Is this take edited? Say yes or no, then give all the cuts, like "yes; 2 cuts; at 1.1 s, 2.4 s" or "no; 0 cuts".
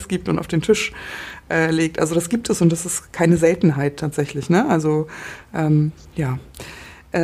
no; 0 cuts